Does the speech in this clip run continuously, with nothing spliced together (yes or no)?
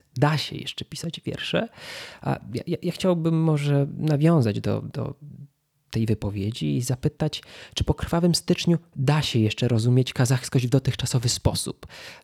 yes